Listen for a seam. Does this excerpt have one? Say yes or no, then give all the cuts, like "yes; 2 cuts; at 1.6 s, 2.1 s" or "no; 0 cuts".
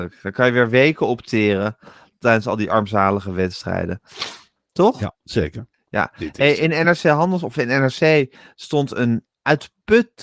no; 0 cuts